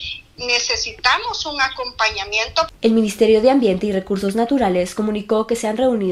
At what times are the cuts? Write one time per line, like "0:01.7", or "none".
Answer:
0:02.8